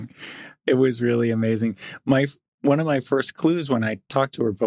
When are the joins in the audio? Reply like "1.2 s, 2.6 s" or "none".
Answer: none

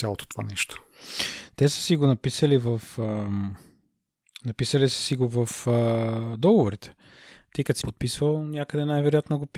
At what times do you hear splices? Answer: 7.8 s

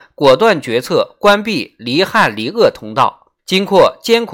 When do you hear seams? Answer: 3.4 s

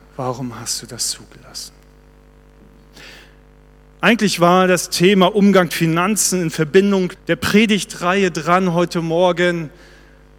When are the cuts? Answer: 5.7 s, 7.2 s

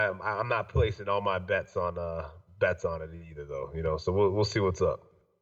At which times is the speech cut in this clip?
none

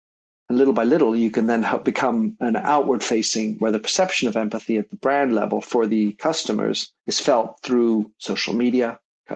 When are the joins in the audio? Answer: 7.0 s

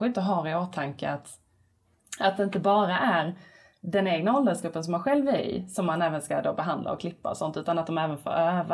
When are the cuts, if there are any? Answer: none

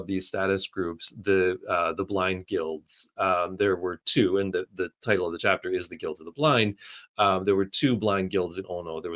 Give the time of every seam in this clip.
none

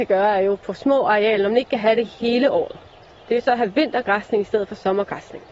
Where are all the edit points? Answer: none

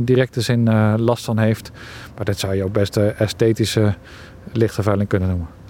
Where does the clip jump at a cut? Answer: none

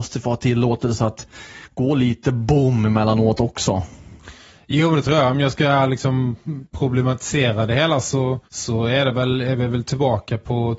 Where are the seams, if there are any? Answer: 8.5 s

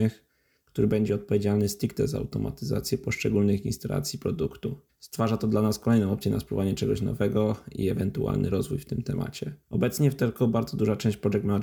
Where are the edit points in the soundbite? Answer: 4.9 s, 9.6 s

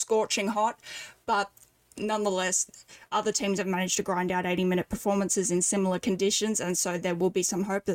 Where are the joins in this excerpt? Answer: none

